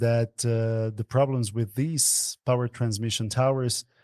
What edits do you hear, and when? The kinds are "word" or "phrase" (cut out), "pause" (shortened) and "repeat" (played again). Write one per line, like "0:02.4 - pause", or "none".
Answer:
none